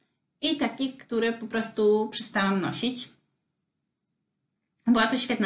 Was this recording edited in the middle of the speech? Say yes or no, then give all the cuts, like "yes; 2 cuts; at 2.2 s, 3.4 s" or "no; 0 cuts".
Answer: no; 0 cuts